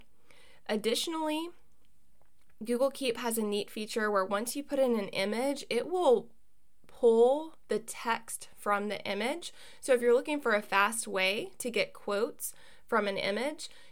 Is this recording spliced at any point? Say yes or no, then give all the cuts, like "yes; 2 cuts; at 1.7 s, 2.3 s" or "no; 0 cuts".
no; 0 cuts